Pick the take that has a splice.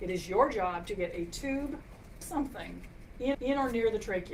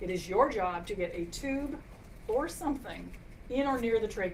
first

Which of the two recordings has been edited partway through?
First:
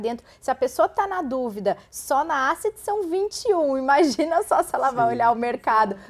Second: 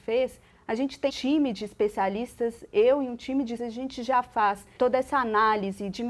second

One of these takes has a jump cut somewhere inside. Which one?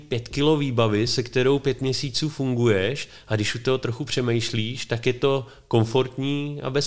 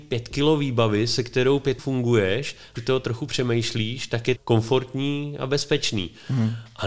second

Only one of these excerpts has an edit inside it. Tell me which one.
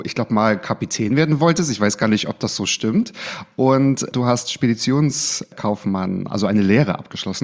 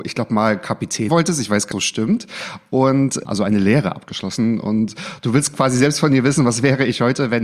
second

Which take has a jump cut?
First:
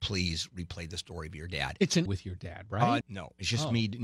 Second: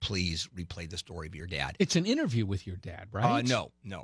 first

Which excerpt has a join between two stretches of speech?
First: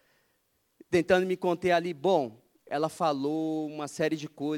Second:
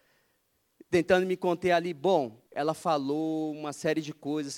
second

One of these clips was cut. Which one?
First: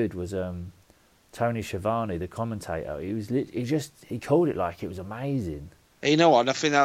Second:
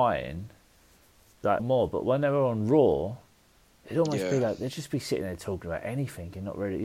second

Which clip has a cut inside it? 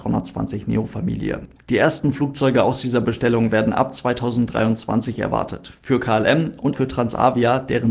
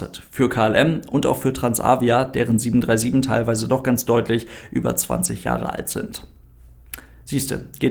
first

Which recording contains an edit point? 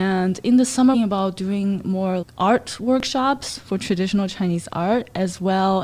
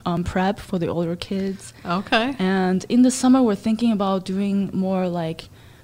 first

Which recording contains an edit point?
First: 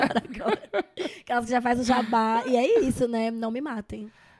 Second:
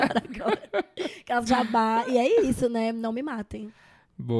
second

